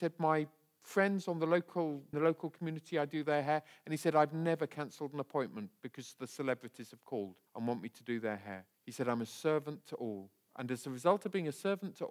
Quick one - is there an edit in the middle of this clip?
yes; 3 cuts; at 2.1 s, 7.5 s, 8.7 s

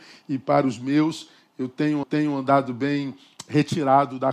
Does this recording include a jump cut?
yes; 1 cut; at 2.0 s

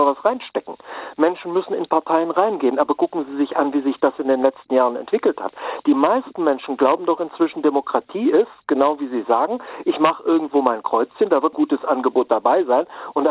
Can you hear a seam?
yes; 1 cut; at 11.5 s

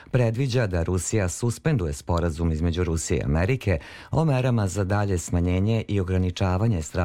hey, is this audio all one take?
yes; 0 cuts

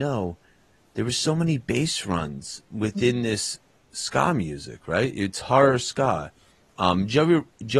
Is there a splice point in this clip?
no; 0 cuts

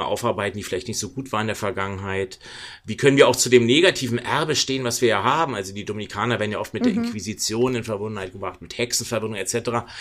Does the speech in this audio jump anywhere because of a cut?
no; 0 cuts

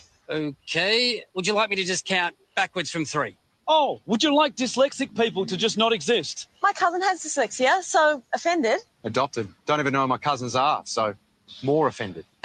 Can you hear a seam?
yes; 1 cut; at 9.6 s

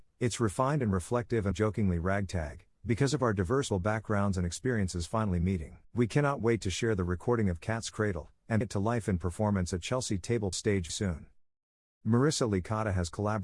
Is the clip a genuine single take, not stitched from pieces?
no; 6 cuts; at 1.5 s, 3.7 s, 5.8 s, 8.6 s, 10.5 s, 10.9 s

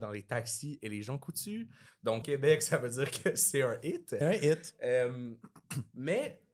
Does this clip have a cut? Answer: yes; 2 cuts; at 2.2 s, 4.2 s

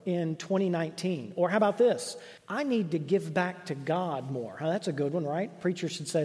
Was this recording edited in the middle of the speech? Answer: yes; 1 cut; at 2.4 s

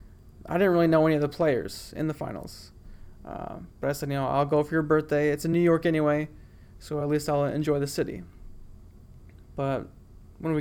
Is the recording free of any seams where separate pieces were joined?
yes; 0 cuts

